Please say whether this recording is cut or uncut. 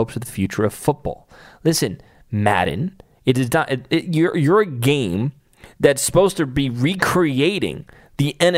uncut